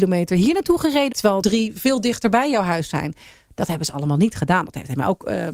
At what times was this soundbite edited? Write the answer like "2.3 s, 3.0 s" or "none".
1.1 s, 1.4 s

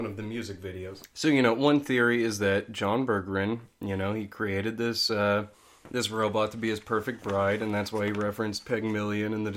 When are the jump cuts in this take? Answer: none

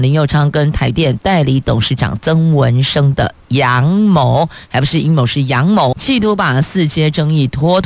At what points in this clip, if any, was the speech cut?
5.9 s

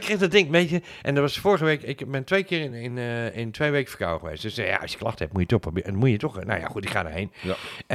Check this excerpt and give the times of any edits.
none

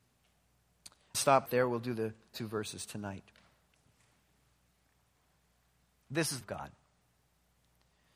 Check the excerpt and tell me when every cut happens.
1.1 s, 1.5 s, 2.3 s, 6.4 s

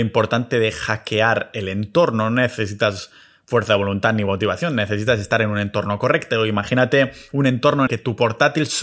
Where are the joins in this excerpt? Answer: 7.9 s

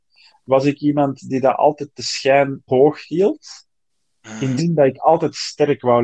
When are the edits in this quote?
2.7 s, 4.6 s

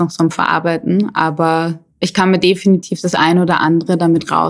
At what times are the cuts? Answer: none

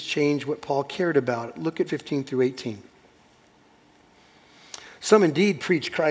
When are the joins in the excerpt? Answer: 1.9 s

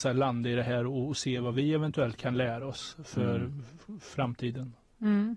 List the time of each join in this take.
none

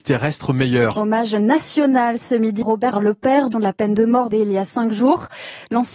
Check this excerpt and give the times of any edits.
2.6 s, 2.9 s, 3.5 s, 4.3 s

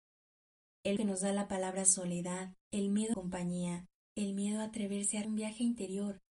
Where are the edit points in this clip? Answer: 1.0 s, 2.6 s, 3.1 s, 4.0 s, 5.2 s

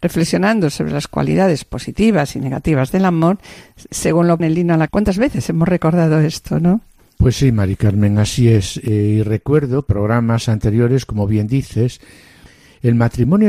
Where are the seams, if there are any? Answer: 3.9 s, 4.4 s, 4.9 s, 9.9 s

